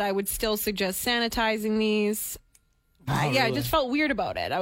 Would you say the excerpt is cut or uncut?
uncut